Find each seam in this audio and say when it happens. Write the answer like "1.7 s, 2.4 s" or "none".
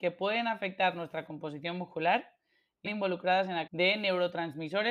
2.9 s, 3.7 s